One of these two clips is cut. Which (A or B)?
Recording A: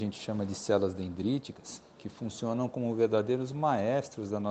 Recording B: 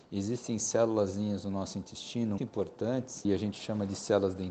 B